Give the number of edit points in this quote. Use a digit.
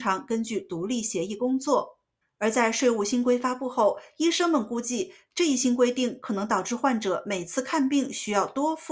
1